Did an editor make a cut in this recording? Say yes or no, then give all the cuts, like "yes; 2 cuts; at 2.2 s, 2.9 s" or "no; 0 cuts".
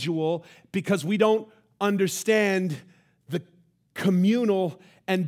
no; 0 cuts